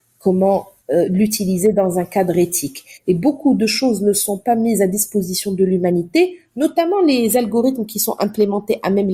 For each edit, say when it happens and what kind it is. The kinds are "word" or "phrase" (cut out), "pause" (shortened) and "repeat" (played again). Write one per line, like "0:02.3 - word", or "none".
none